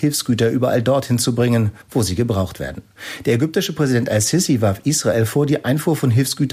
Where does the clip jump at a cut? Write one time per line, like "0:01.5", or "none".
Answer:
0:01.8